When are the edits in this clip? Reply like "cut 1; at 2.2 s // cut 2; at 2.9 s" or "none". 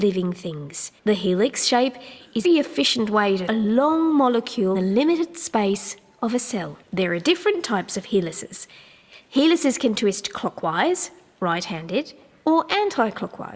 cut 1; at 1.0 s // cut 2; at 2.4 s // cut 3; at 3.5 s // cut 4; at 4.7 s // cut 5; at 6.8 s